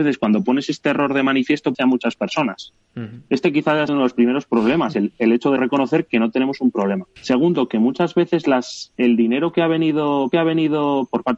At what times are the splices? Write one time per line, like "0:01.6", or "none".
0:01.7
0:03.9
0:05.6
0:07.2
0:10.3